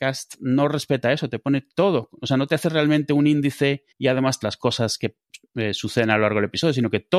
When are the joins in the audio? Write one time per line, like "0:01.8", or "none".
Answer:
0:03.9
0:04.4

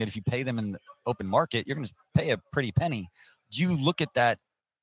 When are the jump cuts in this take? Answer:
none

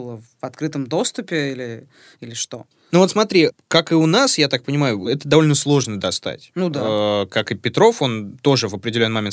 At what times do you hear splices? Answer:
none

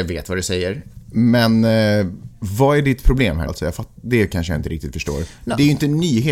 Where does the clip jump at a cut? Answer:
0:03.5

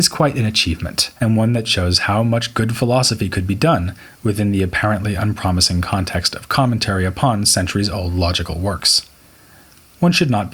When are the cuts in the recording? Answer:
0:01.2

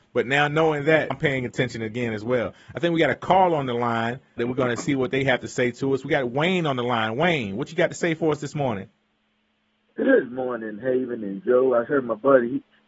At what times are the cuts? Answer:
0:01.1
0:04.4

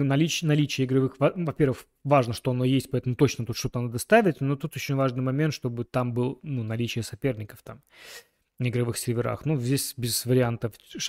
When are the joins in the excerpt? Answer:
0:04.9

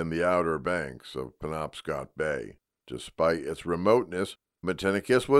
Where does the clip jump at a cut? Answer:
none

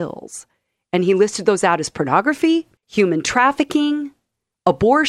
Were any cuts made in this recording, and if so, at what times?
0:02.8

